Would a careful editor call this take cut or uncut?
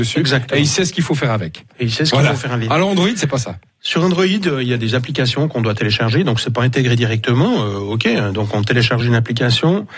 uncut